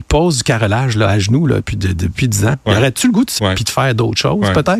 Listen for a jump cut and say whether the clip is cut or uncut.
cut